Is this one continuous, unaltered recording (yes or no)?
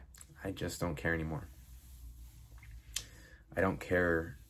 yes